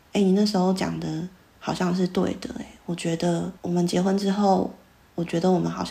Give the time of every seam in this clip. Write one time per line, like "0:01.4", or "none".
0:03.6